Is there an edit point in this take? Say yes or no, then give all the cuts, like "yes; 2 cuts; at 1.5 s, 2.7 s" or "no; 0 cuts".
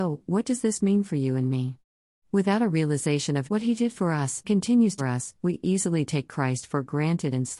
yes; 4 cuts; at 3.5 s, 4.4 s, 5.0 s, 5.4 s